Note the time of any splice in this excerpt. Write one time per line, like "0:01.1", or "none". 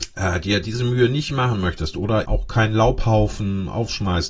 0:02.2

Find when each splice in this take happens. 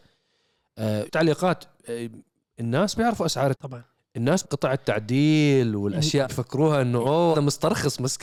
0:01.1
0:02.9
0:03.5
0:04.4
0:06.2
0:07.3

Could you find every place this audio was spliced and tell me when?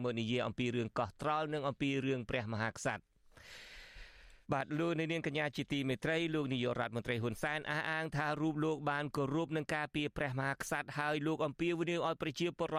0:04.4

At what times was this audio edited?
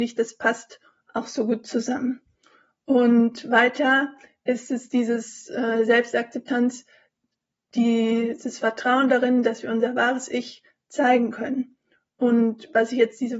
none

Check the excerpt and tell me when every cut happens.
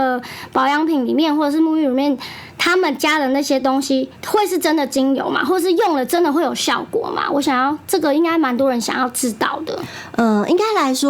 0:04.2

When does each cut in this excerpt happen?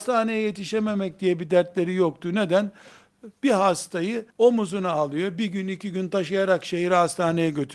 0:04.3

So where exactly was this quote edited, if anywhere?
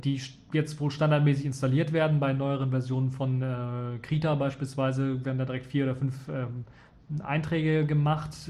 none

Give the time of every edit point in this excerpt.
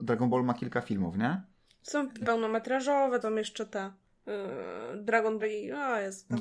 0:02.2
0:03.2
0:05.4

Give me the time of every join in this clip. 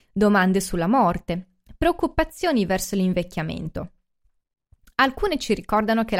none

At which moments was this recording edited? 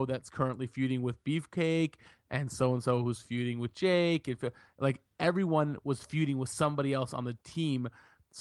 none

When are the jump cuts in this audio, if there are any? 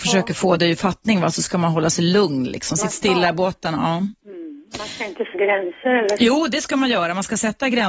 0:05.3

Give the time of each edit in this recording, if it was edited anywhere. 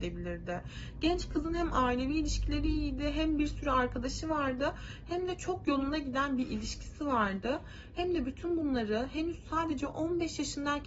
none

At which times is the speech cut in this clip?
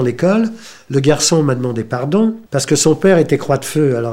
0:02.5

